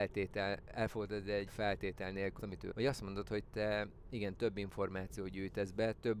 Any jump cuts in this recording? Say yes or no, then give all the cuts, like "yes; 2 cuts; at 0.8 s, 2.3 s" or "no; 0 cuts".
yes; 3 cuts; at 1.5 s, 2.4 s, 2.7 s